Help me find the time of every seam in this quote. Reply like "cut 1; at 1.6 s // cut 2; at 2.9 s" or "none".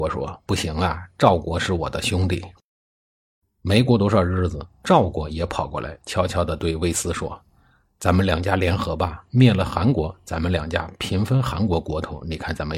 none

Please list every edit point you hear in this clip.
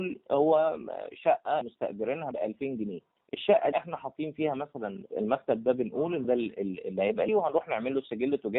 cut 1; at 1.6 s // cut 2; at 2.3 s // cut 3; at 3.7 s // cut 4; at 5.1 s // cut 5; at 6.2 s // cut 6; at 7.3 s

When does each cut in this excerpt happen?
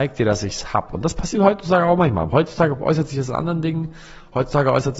none

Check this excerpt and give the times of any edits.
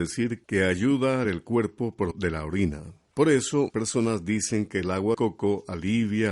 cut 1; at 1.2 s // cut 2; at 2.1 s // cut 3; at 3.7 s // cut 4; at 5.1 s

